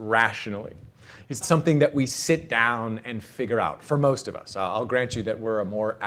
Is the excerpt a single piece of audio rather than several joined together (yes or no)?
no